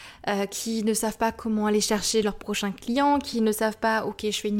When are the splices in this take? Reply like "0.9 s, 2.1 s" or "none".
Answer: none